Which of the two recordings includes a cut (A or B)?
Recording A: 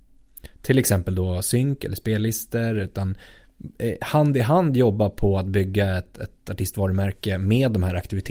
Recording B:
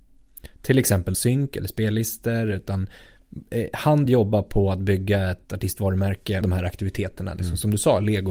B